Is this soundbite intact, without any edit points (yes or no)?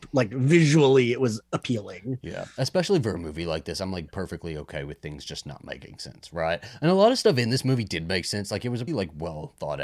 no